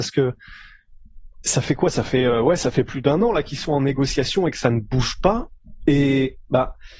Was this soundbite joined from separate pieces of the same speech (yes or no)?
no